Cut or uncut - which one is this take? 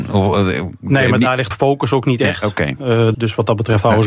cut